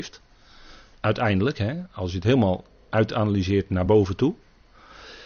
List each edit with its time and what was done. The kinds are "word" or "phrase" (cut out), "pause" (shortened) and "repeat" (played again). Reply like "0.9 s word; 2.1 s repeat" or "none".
none